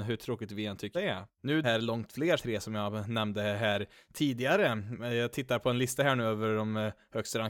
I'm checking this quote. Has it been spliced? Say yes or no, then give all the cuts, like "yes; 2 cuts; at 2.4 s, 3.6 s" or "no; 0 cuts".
yes; 3 cuts; at 0.9 s, 1.6 s, 2.4 s